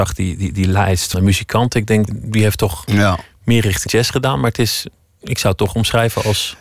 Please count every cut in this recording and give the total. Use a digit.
3